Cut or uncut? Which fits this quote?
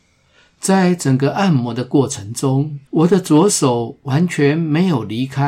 cut